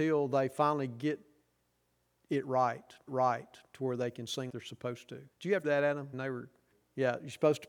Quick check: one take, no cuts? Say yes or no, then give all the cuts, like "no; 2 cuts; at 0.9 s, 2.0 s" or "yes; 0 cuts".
no; 6 cuts; at 3.1 s, 4.5 s, 5.3 s, 5.6 s, 6.1 s, 6.7 s